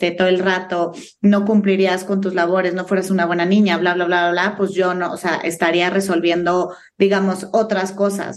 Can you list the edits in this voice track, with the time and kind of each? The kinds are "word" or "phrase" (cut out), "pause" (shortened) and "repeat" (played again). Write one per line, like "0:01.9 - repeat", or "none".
none